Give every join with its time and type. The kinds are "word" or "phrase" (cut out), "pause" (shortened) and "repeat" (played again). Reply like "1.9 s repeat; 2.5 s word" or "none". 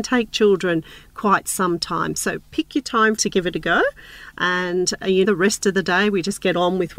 3.2 s phrase; 5.2 s word